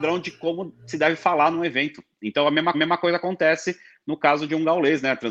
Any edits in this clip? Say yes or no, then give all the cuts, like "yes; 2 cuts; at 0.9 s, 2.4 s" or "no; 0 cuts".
yes; 1 cut; at 2.7 s